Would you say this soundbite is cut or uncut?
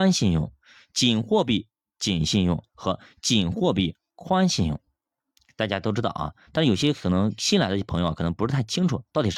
uncut